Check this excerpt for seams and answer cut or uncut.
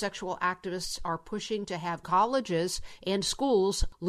cut